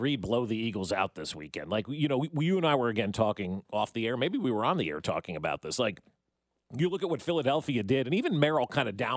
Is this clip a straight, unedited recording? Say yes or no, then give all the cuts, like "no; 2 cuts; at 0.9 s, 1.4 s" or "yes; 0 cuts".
yes; 0 cuts